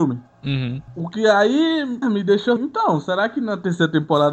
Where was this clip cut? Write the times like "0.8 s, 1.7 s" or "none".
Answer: 2.0 s, 2.6 s